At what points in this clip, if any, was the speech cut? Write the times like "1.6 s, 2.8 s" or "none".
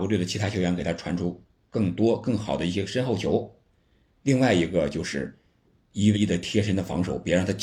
6.1 s